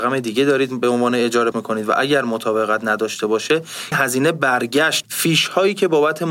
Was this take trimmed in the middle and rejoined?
yes; 3 cuts; at 1.5 s, 3.9 s, 5.0 s

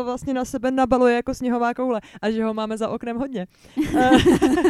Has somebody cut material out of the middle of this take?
no; 0 cuts

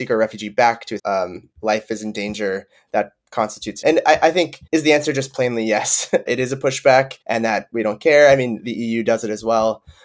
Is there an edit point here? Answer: yes; 5 cuts; at 1.0 s, 3.8 s, 4.7 s, 6.3 s, 7.2 s

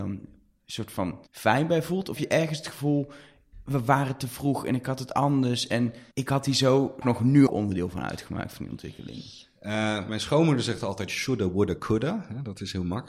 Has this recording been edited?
yes; 6 cuts; at 1.3 s, 2.2 s, 6.1 s, 7.0 s, 7.5 s, 10.1 s

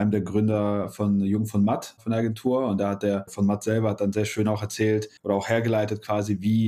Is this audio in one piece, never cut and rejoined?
no; 1 cut; at 5.2 s

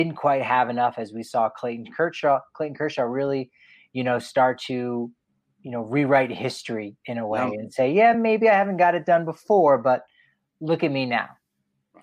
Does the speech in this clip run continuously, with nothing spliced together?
yes; 0 cuts

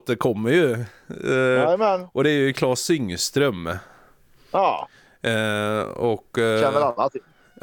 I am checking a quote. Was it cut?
no; 0 cuts

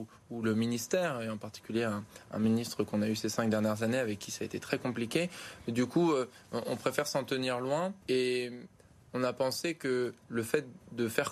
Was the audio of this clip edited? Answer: yes; 1 cut; at 8.0 s

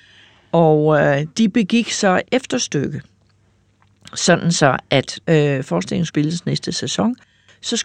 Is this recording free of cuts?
no; 4 cuts; at 1.3 s, 2.2 s, 5.2 s, 6.1 s

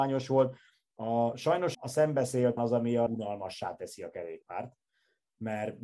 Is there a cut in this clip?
yes; 3 cuts; at 1.7 s, 2.6 s, 3.1 s

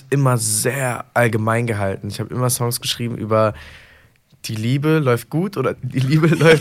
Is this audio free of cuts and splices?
yes; 0 cuts

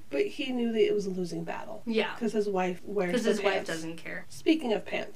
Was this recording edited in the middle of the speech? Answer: no; 0 cuts

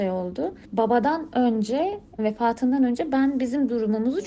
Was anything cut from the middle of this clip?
yes; 1 cut; at 2.2 s

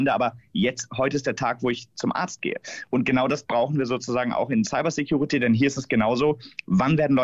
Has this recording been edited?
no; 0 cuts

